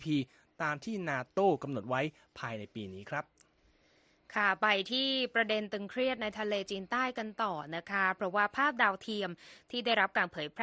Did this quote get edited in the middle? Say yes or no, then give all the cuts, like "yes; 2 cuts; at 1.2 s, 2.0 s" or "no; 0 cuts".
no; 0 cuts